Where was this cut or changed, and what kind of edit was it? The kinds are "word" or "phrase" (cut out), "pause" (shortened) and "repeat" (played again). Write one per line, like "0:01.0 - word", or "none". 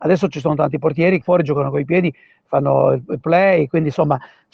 0:01.2 - word
0:03.2 - word